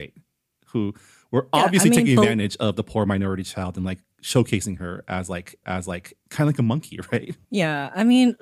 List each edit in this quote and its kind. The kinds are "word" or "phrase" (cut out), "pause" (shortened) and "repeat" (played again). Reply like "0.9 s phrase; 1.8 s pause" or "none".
5.6 s repeat